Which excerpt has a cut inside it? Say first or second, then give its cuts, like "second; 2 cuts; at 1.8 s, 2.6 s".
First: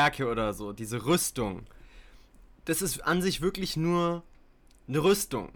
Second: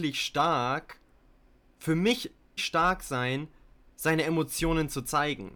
second; 1 cut; at 2.6 s